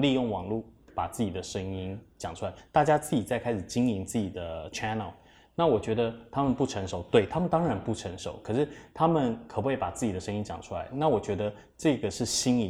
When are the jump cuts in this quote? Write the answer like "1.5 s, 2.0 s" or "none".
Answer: none